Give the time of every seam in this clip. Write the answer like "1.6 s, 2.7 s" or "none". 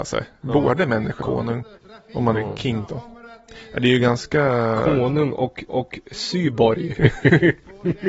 1.2 s, 1.7 s, 2.3 s, 2.9 s, 5.7 s